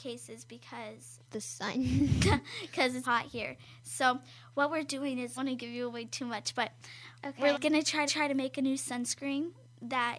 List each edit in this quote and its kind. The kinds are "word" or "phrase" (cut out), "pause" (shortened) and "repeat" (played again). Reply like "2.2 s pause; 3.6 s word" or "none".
1.2 s phrase; 3.0 s word; 5.4 s phrase; 7.5 s word; 8.1 s repeat